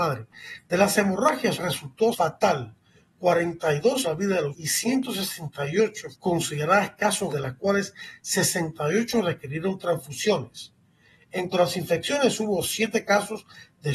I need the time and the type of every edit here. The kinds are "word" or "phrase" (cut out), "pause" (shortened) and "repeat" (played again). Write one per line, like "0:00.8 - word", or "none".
0:01.6 - word
0:02.1 - word
0:04.0 - word
0:04.5 - word
0:06.1 - word
0:07.3 - word
0:11.5 - word